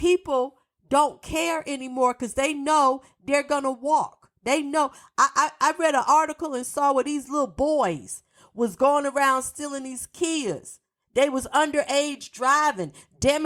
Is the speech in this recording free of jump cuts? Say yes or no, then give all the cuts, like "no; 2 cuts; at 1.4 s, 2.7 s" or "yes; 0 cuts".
yes; 0 cuts